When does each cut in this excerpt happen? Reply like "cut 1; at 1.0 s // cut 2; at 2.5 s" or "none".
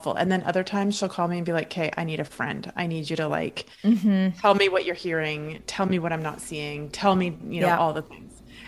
none

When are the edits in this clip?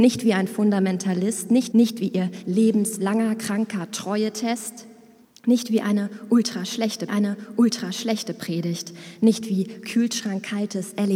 cut 1; at 1.7 s // cut 2; at 5.2 s // cut 3; at 7.1 s

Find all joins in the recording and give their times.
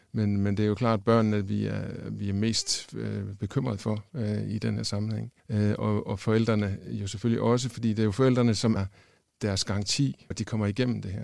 cut 1; at 5.4 s // cut 2; at 8.8 s // cut 3; at 10.3 s

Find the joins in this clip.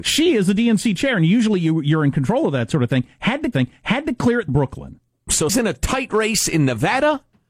cut 1; at 3.5 s // cut 2; at 4.5 s // cut 3; at 5.5 s

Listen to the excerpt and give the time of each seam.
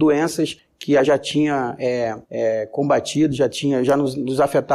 cut 1; at 1.0 s // cut 2; at 2.2 s

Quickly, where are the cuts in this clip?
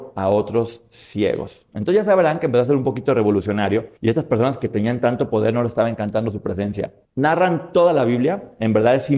cut 1; at 4.0 s // cut 2; at 7.0 s

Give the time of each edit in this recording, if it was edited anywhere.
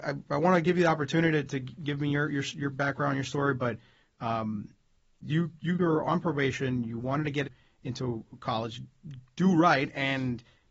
none

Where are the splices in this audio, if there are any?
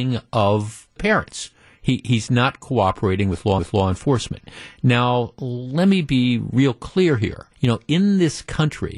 cut 1; at 1.0 s // cut 2; at 3.6 s // cut 3; at 7.5 s

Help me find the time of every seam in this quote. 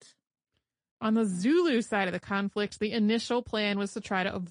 none

